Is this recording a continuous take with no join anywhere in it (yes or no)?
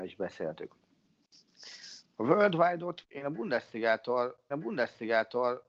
no